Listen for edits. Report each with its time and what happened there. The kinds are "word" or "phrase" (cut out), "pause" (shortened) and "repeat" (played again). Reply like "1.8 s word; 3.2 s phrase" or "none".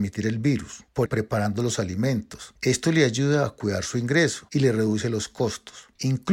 1.1 s phrase

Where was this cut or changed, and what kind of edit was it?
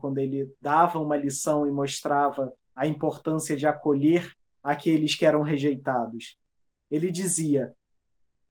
2.6 s pause

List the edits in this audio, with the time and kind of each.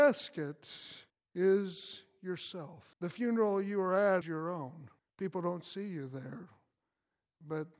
1.1 s pause; 2.9 s pause; 4.2 s word; 5.0 s pause

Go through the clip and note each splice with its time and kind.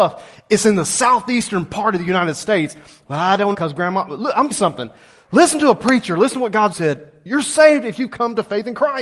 3.5 s word; 4.5 s word; 6.7 s word

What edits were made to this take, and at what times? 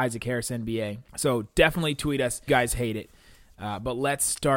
1.1 s pause; 2.5 s phrase

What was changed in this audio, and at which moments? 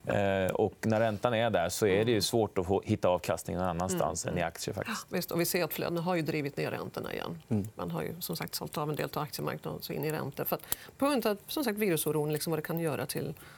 none

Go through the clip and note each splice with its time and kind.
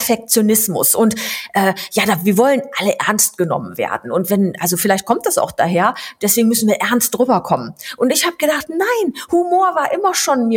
none

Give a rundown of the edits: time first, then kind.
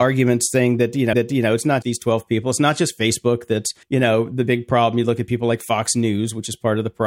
1.1 s repeat; 1.8 s word; 3.8 s pause

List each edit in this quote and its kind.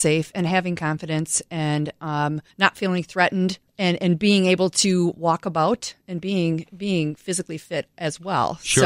2.5 s pause; 3.7 s pause

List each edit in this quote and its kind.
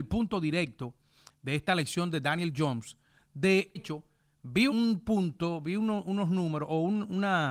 3.8 s phrase; 4.7 s word

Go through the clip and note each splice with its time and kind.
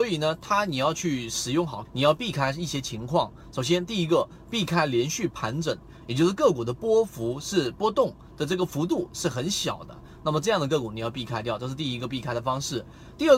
1.9 s word

